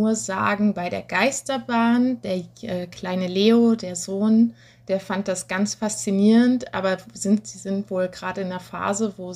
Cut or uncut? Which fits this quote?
uncut